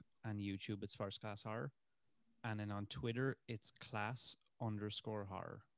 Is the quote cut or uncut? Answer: uncut